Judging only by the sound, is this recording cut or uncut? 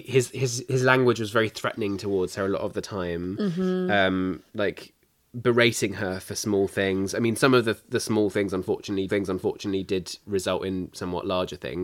cut